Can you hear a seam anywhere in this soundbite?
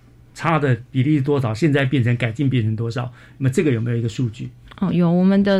no; 0 cuts

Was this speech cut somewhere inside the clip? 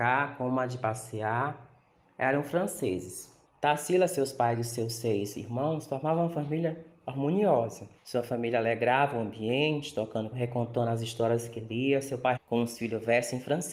yes; 4 cuts; at 3.4 s, 8.0 s, 10.3 s, 12.4 s

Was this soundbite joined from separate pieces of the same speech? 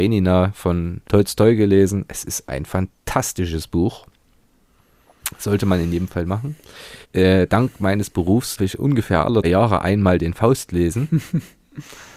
yes; 5 cuts; at 1.0 s, 2.4 s, 7.0 s, 8.6 s, 9.4 s

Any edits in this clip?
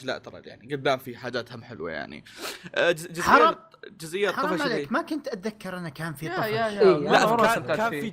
no; 0 cuts

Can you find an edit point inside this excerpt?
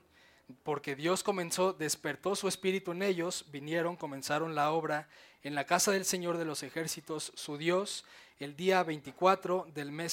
no; 0 cuts

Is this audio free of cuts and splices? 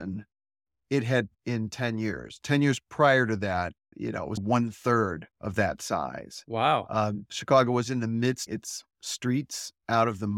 no; 5 cuts; at 1.3 s, 3.9 s, 4.4 s, 5.3 s, 8.5 s

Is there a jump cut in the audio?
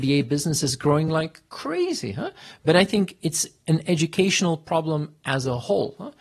no; 0 cuts

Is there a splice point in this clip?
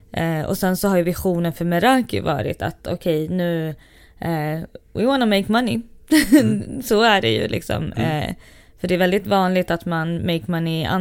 no; 0 cuts

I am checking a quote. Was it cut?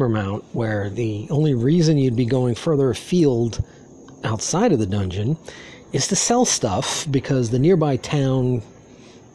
yes; 1 cut; at 5.8 s

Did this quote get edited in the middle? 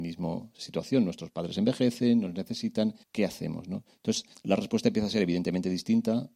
yes; 2 cuts; at 3.0 s, 4.3 s

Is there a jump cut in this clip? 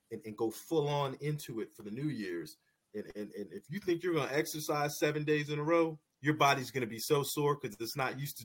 no; 0 cuts

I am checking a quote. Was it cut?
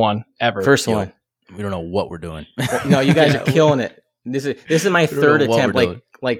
no; 0 cuts

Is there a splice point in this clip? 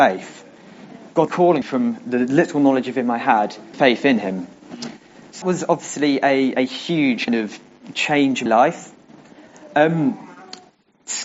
yes; 7 cuts; at 1.3 s, 1.6 s, 3.7 s, 5.4 s, 6.5 s, 7.3 s, 8.5 s

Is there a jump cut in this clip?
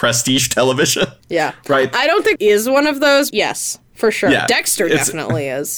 yes; 3 cuts; at 1.2 s, 2.4 s, 3.3 s

